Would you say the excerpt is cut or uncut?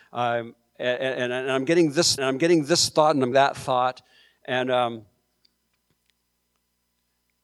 cut